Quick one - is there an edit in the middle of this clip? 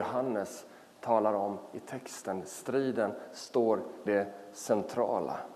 yes; 1 cut; at 4.1 s

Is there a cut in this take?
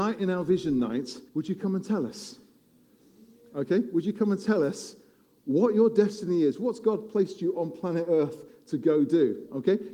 yes; 1 cut; at 1.3 s

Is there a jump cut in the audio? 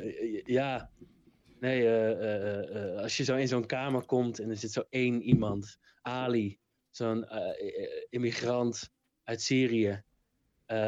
no; 0 cuts

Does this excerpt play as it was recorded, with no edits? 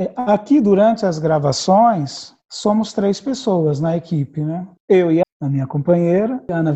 no; 3 cuts; at 2.4 s, 4.8 s, 5.2 s

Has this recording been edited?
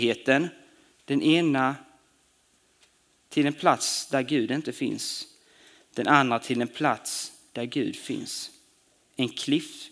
no; 0 cuts

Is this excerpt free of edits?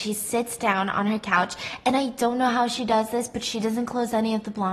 yes; 0 cuts

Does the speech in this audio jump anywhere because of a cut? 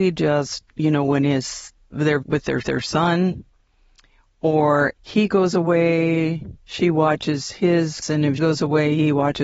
yes; 6 cuts; at 2.2 s, 2.6 s, 5.0 s, 6.6 s, 8.0 s, 8.4 s

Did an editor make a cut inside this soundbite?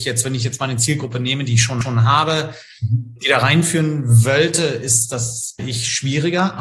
yes; 2 cuts; at 1.8 s, 5.6 s

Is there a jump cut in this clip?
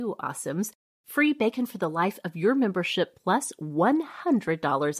no; 0 cuts

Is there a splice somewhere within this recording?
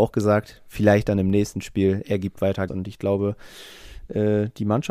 yes; 1 cut; at 2.7 s

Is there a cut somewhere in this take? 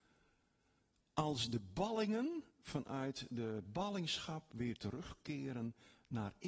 yes; 1 cut; at 2.5 s

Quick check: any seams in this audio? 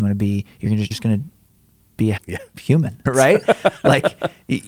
yes; 3 cuts; at 0.9 s, 2.2 s, 3.1 s

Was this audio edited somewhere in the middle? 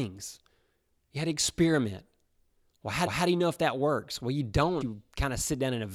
yes; 2 cuts; at 3.1 s, 4.8 s

